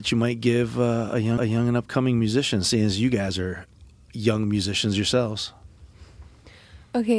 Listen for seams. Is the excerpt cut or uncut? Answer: cut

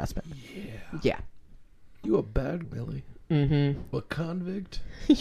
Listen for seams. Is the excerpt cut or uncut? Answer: cut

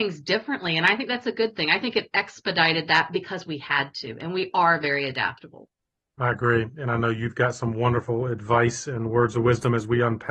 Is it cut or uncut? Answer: uncut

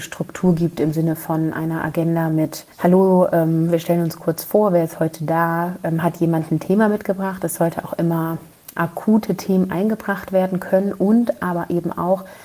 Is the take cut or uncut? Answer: cut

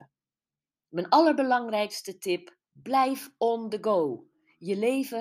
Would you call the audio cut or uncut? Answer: cut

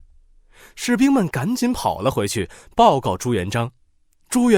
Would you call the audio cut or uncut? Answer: uncut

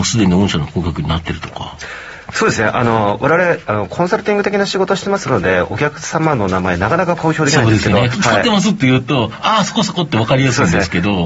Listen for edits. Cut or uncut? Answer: cut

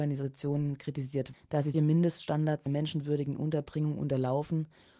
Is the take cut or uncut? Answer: cut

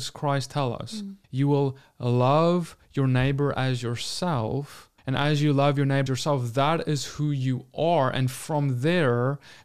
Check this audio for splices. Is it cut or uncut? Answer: cut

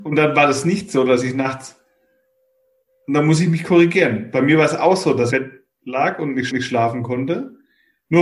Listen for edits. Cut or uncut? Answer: cut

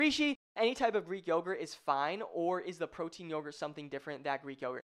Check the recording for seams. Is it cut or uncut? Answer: uncut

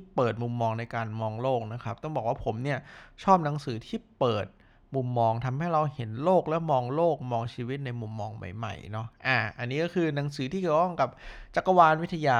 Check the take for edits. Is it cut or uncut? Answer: uncut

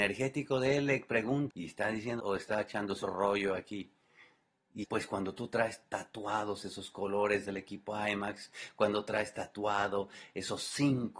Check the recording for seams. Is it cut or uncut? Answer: cut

